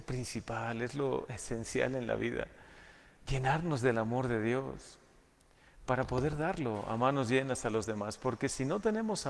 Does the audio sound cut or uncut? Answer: uncut